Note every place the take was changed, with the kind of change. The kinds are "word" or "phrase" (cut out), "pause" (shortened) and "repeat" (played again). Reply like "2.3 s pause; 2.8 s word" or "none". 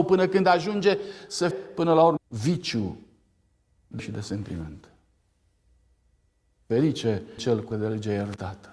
1.5 s word; 2.2 s word; 4.0 s word; 7.4 s word; 7.7 s word